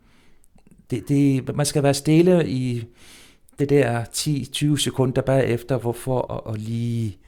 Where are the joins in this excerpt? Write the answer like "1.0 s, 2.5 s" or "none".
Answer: 6.3 s